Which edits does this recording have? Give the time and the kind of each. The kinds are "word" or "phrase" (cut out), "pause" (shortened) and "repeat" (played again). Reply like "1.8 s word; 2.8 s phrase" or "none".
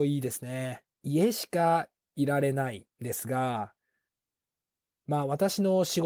0.9 s pause